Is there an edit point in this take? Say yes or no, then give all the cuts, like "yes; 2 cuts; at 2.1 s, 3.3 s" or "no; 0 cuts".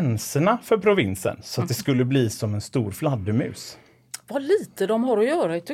no; 0 cuts